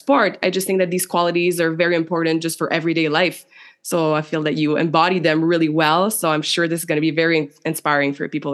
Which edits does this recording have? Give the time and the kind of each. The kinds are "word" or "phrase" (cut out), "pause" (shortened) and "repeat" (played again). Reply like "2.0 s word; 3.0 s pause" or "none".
none